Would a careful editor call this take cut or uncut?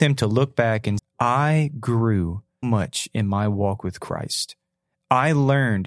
cut